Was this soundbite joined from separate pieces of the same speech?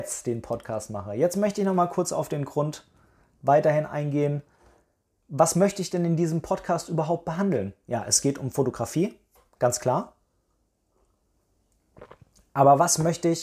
no; 0 cuts

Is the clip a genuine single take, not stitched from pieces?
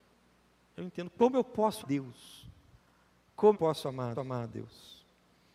no; 3 cuts; at 1.8 s, 3.5 s, 4.1 s

